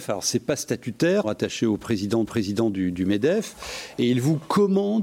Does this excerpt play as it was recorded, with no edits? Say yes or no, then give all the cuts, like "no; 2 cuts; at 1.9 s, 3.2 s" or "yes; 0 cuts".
no; 2 cuts; at 1.2 s, 2.2 s